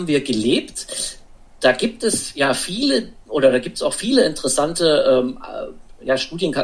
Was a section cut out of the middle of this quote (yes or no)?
no